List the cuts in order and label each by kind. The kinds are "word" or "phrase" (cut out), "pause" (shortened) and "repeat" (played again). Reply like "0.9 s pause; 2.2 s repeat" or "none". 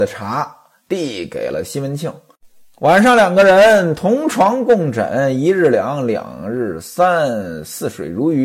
none